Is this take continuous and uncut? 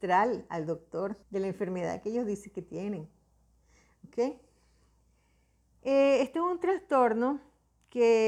no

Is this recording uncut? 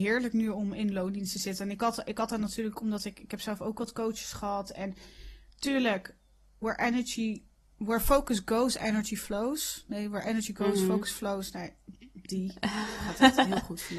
no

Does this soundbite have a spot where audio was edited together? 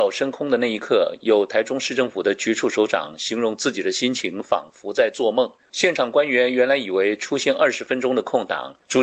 no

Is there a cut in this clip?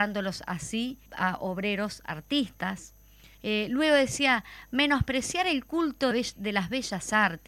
yes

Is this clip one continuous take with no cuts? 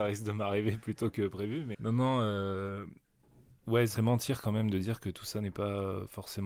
no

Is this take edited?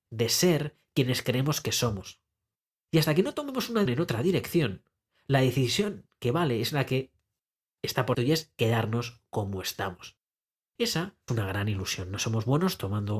yes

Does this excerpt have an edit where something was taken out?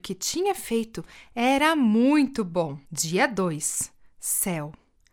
yes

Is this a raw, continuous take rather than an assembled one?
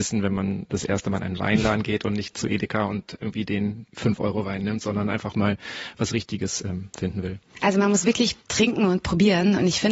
no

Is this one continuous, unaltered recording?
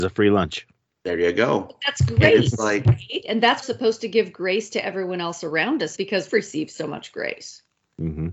no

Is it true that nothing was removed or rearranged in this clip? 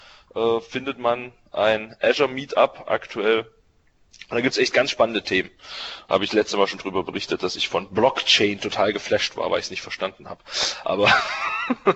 yes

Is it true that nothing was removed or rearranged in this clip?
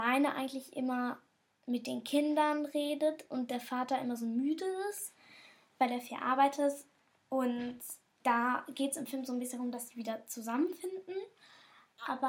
no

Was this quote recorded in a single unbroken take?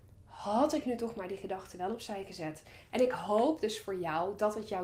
yes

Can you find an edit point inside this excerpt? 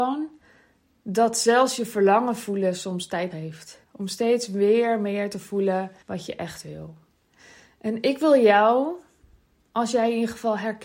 yes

